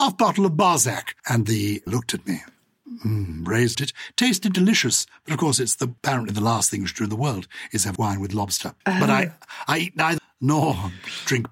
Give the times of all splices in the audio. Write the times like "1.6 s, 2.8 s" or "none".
1.2 s, 1.9 s, 3.7 s, 6.0 s, 8.0 s, 8.8 s, 10.2 s